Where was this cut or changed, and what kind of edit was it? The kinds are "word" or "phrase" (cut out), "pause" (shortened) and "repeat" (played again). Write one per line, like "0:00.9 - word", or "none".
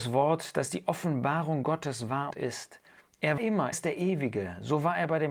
0:02.3 - word
0:03.4 - word
0:03.7 - word